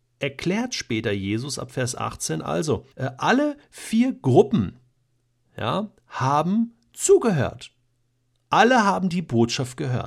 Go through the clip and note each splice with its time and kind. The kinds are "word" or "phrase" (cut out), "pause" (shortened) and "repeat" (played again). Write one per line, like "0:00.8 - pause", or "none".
0:02.9 - pause